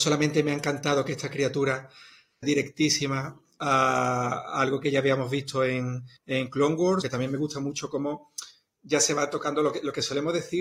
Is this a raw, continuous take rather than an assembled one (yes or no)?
no